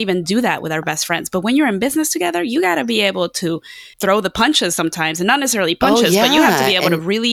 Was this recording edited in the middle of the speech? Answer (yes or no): yes